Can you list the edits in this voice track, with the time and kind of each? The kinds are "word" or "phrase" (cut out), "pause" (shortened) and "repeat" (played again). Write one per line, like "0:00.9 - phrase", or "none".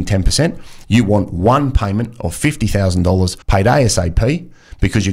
0:03.4 - pause